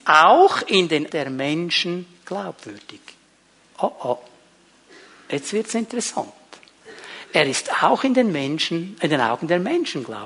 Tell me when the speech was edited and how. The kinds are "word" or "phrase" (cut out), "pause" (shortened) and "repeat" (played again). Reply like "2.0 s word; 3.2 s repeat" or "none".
1.1 s word